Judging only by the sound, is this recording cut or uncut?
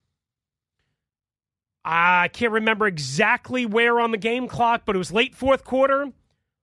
uncut